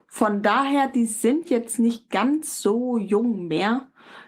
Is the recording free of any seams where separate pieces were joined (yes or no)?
yes